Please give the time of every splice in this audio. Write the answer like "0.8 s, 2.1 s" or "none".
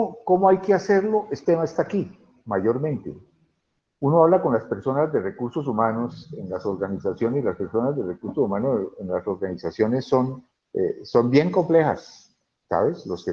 1.4 s, 3.8 s, 10.5 s